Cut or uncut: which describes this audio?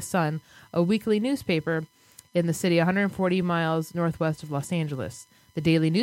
uncut